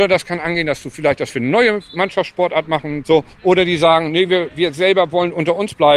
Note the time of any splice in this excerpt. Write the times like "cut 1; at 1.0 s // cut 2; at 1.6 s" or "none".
none